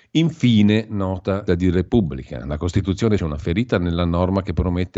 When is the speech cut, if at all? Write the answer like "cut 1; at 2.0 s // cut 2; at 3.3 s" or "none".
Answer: cut 1; at 1.5 s // cut 2; at 3.2 s

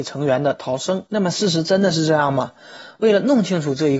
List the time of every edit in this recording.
cut 1; at 1.1 s

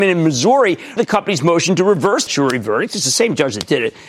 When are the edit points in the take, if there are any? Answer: cut 1; at 1.0 s // cut 2; at 2.3 s

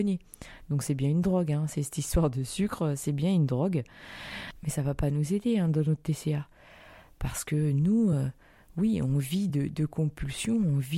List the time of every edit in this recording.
none

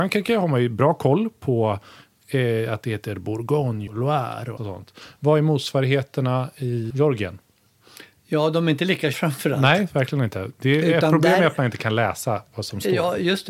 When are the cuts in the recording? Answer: cut 1; at 3.9 s // cut 2; at 4.6 s // cut 3; at 6.9 s // cut 4; at 9.1 s

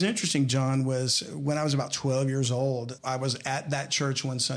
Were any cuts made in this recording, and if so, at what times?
cut 1; at 3.0 s

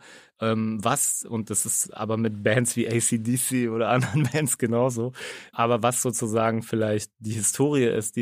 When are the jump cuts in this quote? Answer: cut 1; at 5.5 s

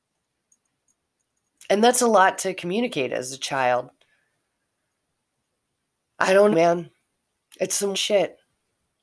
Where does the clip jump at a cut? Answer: cut 1; at 6.5 s // cut 2; at 7.9 s

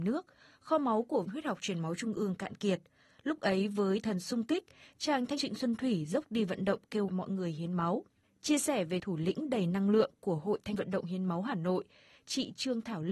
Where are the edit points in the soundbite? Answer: cut 1; at 1.2 s // cut 2; at 4.0 s // cut 3; at 5.4 s // cut 4; at 6.2 s // cut 5; at 7.1 s // cut 6; at 9.0 s // cut 7; at 10.7 s

